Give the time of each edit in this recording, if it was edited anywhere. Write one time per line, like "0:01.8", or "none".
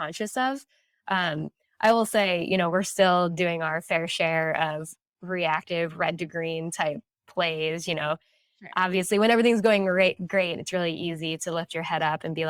none